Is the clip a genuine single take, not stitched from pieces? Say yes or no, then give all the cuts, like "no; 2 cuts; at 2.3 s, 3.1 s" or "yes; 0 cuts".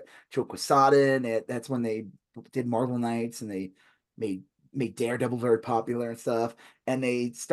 yes; 0 cuts